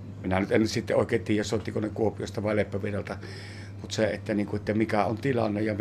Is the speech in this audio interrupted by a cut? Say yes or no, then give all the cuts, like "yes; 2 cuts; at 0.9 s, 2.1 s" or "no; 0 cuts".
no; 0 cuts